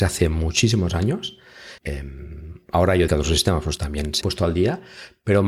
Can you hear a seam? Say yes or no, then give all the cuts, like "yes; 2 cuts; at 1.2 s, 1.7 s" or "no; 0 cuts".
yes; 4 cuts; at 1.8 s, 3.1 s, 3.8 s, 4.2 s